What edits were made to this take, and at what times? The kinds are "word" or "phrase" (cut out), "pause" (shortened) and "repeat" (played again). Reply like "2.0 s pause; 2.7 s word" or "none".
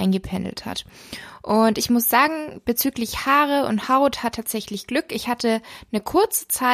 4.3 s word